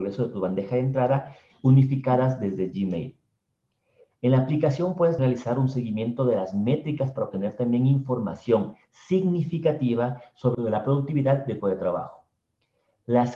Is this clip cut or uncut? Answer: cut